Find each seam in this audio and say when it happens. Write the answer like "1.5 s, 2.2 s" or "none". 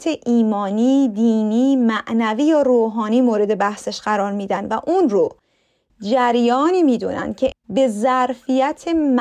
7.5 s